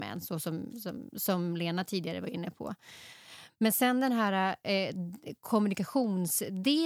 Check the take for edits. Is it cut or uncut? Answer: uncut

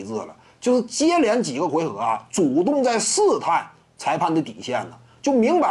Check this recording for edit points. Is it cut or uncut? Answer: uncut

